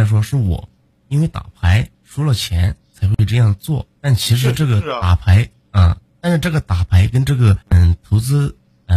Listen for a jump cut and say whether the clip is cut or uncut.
cut